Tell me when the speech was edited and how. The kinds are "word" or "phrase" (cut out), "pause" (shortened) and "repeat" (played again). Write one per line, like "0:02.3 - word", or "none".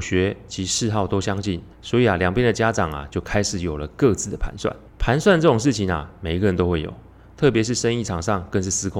0:01.7 - pause
0:04.9 - pause